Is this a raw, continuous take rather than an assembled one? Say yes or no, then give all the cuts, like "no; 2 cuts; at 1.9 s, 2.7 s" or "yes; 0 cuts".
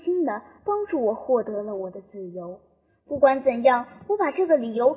yes; 0 cuts